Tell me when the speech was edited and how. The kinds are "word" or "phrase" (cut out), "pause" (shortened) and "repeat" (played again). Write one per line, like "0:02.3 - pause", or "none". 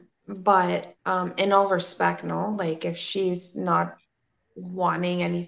0:01.0 - pause